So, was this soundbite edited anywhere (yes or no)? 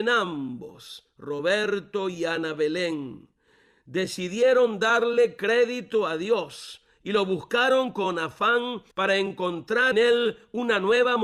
yes